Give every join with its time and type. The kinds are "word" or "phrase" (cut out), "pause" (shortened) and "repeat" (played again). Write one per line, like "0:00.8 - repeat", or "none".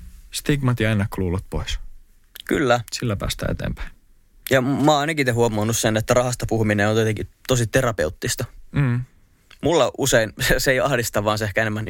none